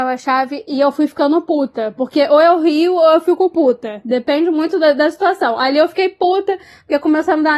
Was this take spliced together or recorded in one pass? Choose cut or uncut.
uncut